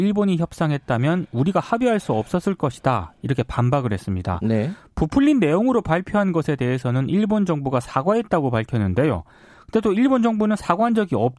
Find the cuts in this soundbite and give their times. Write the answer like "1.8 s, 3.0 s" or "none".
none